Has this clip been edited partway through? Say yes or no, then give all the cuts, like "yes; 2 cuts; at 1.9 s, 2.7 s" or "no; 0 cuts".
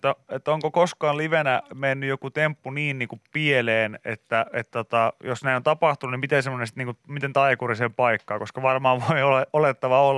no; 0 cuts